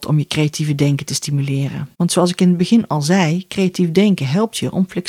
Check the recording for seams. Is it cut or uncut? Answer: cut